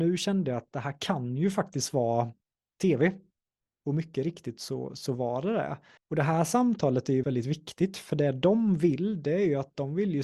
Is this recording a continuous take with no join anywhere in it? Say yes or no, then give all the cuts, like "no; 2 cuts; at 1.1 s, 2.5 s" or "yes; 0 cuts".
no; 2 cuts; at 6.0 s, 7.2 s